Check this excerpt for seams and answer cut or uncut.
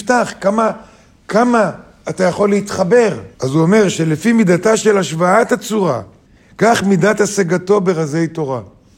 cut